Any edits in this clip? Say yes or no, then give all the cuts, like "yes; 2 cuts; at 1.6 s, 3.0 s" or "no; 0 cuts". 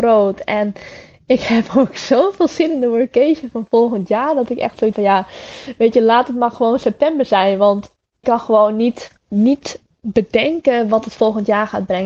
yes; 3 cuts; at 4.9 s, 8.2 s, 9.2 s